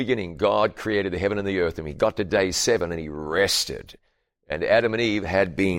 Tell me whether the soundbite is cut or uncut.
uncut